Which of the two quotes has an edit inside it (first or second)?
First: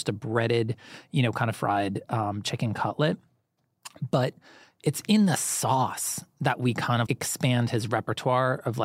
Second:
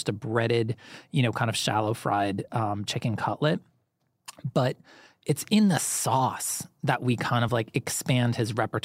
first